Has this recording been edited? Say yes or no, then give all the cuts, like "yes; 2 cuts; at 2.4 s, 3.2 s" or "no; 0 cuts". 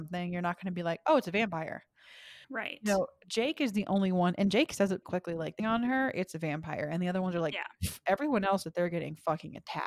yes; 4 cuts; at 2.4 s, 5.0 s, 5.6 s, 8.6 s